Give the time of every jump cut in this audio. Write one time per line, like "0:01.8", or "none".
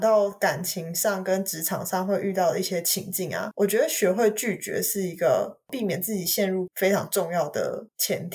0:06.7